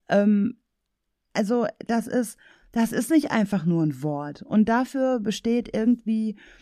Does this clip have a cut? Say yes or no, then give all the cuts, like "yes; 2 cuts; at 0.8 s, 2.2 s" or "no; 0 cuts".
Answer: no; 0 cuts